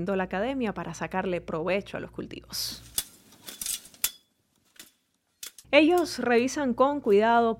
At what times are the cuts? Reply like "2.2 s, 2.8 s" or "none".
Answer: 5.6 s

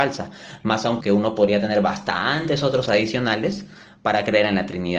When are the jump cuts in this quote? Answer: 1.0 s, 2.9 s

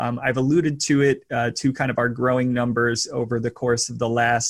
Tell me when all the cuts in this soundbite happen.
none

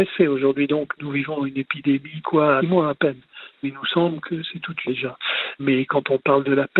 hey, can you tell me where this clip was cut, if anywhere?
2.2 s, 2.6 s, 4.8 s

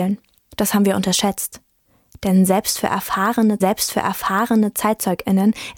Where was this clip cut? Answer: 3.6 s

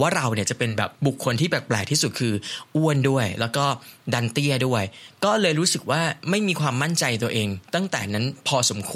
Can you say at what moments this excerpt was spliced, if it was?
1.0 s

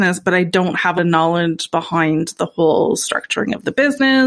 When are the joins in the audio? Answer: 1.0 s

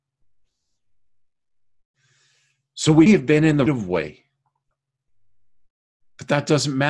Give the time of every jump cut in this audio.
3.1 s, 3.7 s

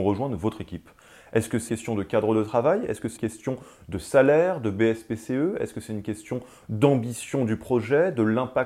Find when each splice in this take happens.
1.7 s, 3.2 s

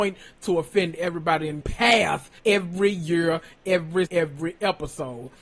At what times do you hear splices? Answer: 1.6 s, 2.4 s, 4.1 s

